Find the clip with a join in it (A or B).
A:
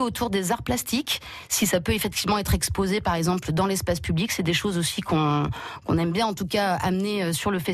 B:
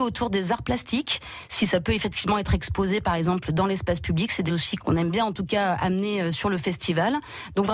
B